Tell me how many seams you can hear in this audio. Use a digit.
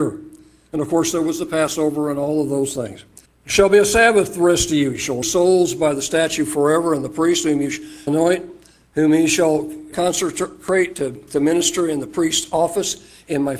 4